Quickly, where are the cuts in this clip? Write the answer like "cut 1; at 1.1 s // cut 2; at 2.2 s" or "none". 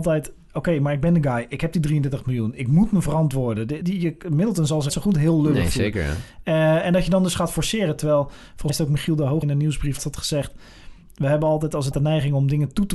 cut 1; at 3.8 s // cut 2; at 4.9 s // cut 3; at 8.7 s // cut 4; at 9.4 s // cut 5; at 10.0 s // cut 6; at 11.9 s